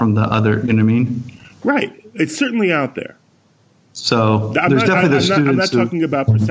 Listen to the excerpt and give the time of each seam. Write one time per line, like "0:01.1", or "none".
none